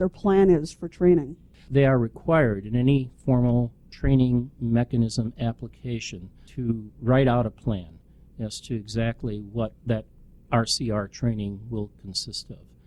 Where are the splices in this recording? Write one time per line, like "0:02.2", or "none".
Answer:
0:06.9
0:09.8